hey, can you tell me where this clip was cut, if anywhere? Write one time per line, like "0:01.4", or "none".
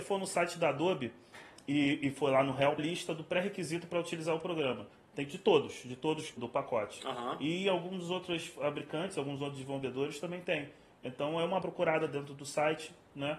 0:02.8
0:06.4
0:11.6